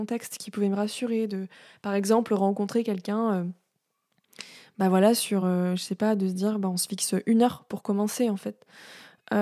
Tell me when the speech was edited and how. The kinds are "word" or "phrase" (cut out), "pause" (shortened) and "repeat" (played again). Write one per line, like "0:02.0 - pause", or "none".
none